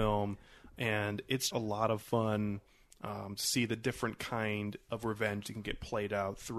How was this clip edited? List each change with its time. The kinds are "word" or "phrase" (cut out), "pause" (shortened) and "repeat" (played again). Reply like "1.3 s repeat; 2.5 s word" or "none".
1.5 s word